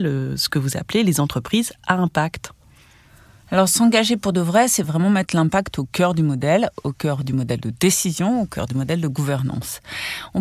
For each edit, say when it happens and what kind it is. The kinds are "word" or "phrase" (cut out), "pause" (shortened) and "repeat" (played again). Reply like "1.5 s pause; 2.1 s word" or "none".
none